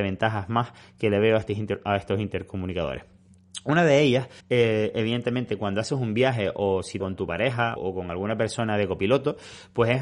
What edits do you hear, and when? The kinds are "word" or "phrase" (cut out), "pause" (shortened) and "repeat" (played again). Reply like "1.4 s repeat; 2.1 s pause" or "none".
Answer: 4.4 s pause; 7.0 s phrase; 7.8 s word